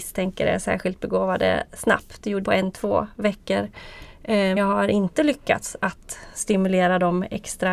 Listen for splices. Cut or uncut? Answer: cut